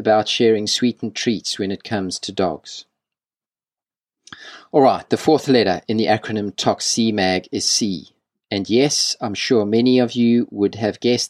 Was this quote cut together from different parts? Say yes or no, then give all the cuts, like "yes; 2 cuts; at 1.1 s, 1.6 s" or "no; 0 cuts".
no; 0 cuts